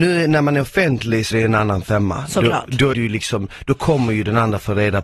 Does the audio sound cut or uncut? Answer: cut